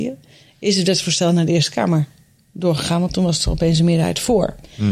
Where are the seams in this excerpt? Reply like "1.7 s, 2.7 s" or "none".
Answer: none

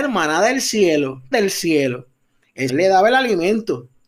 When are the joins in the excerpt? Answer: 1.3 s, 2.7 s

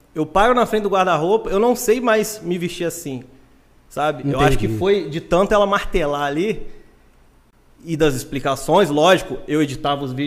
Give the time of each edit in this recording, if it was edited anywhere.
none

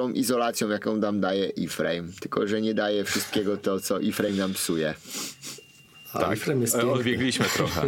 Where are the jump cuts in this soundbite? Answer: none

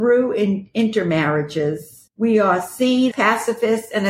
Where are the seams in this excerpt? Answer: 2.1 s, 3.1 s

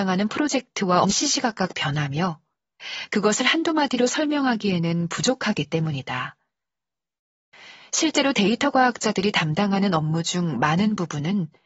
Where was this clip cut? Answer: 1.0 s

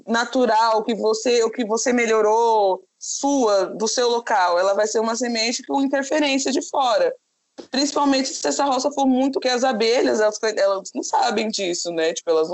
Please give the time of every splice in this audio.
2.9 s, 9.4 s

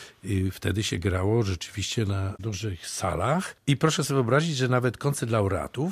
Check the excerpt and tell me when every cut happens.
none

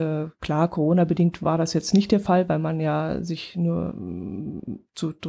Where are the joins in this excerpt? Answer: none

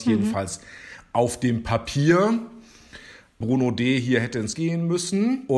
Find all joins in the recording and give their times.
4.5 s

